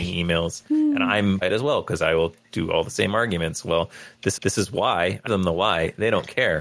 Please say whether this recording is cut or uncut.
cut